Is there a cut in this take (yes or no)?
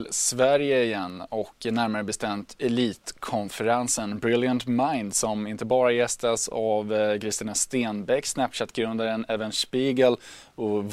no